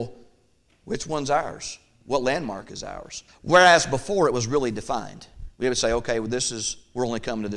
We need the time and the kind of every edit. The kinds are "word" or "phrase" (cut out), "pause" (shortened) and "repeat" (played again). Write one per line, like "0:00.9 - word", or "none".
0:03.3 - pause
0:05.5 - pause